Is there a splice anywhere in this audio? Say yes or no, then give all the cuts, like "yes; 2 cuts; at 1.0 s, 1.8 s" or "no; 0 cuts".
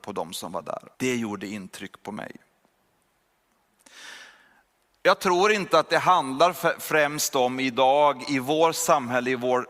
yes; 1 cut; at 0.9 s